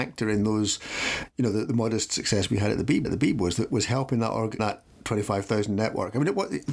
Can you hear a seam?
yes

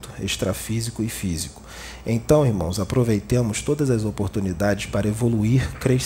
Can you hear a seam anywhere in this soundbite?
no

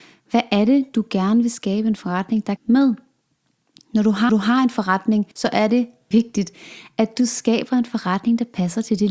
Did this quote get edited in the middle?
yes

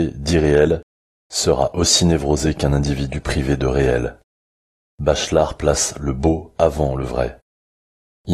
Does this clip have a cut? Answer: no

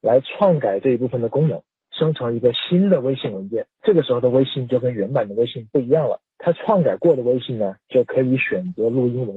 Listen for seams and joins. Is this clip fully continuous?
no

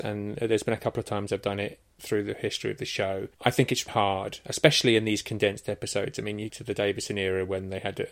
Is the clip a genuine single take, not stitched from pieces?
no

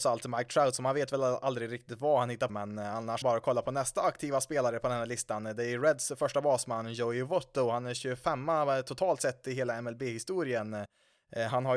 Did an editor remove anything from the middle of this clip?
yes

